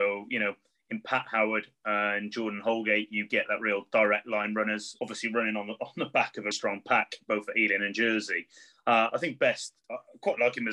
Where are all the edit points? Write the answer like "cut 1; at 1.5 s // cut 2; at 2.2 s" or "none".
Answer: cut 1; at 6.5 s